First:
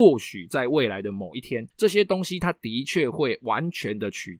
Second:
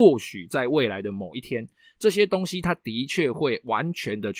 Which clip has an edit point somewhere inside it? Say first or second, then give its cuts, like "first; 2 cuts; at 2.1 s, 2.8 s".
first; 1 cut; at 1.7 s